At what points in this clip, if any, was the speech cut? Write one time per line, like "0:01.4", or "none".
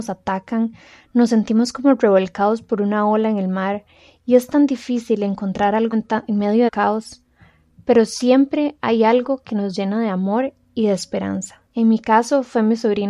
0:05.9
0:06.7
0:11.7